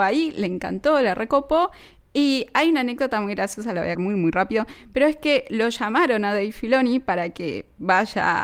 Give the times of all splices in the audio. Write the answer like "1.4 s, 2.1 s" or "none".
3.9 s